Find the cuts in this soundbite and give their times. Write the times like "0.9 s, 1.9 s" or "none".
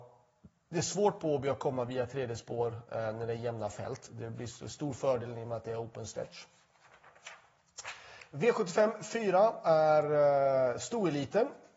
none